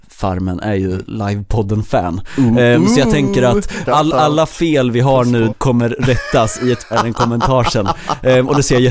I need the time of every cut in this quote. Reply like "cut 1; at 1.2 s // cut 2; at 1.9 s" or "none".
cut 1; at 1.1 s // cut 2; at 3.9 s // cut 3; at 5.5 s // cut 4; at 6.9 s